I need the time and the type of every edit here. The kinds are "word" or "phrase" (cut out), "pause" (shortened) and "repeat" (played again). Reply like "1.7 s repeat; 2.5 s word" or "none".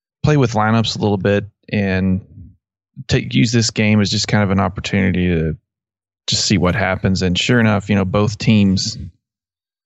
none